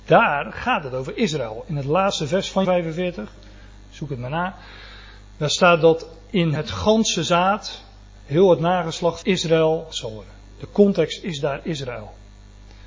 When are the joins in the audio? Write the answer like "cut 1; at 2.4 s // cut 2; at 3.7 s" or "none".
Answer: cut 1; at 2.6 s // cut 2; at 6.5 s // cut 3; at 9.2 s // cut 4; at 9.9 s